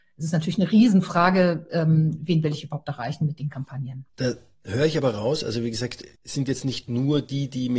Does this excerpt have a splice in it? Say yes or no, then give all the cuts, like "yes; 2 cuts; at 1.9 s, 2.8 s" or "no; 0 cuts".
yes; 2 cuts; at 4.1 s, 6.1 s